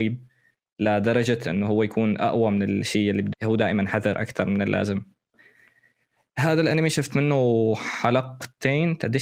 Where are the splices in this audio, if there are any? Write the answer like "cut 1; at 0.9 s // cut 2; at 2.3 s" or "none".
cut 1; at 3.3 s